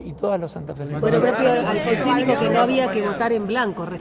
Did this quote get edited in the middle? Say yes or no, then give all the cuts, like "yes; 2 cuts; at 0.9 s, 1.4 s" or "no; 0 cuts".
yes; 1 cut; at 1.2 s